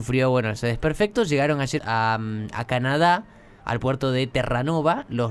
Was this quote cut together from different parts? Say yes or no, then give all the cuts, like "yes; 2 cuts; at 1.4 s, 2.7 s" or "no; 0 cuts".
yes; 1 cut; at 1.8 s